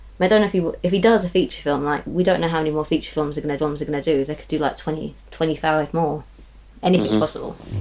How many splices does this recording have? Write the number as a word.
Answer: one